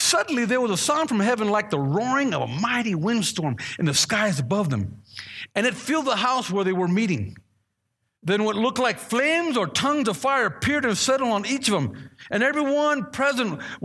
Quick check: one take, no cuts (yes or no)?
yes